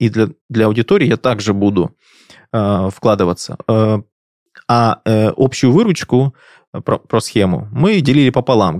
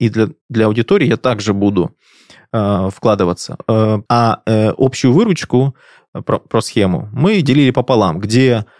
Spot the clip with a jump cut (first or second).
second